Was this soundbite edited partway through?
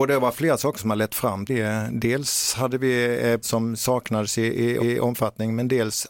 yes; 3 cuts; at 1.5 s, 3.4 s, 4.8 s

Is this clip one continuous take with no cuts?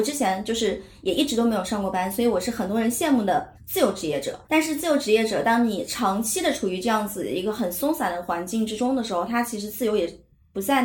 no; 2 cuts; at 3.5 s, 4.4 s

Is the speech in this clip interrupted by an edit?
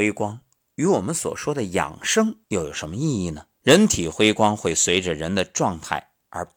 yes; 2 cuts; at 2.4 s, 3.5 s

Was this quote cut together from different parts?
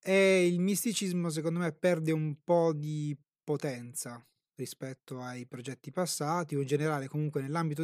no; 0 cuts

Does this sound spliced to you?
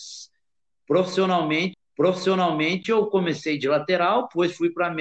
yes; 1 cut; at 1.7 s

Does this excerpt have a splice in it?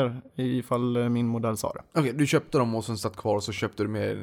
yes; 1 cut; at 1.9 s

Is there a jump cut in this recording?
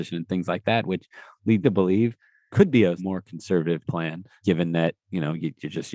yes; 5 cuts; at 1.6 s, 2.5 s, 3.0 s, 3.8 s, 4.4 s

